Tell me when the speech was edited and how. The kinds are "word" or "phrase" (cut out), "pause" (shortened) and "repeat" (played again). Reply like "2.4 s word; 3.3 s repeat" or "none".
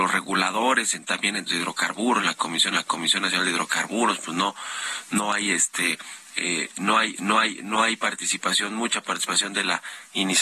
1.5 s word; 2.7 s repeat; 7.1 s repeat